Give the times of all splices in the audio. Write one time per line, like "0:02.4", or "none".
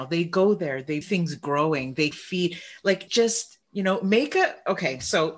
0:01.0
0:02.1
0:03.1
0:03.6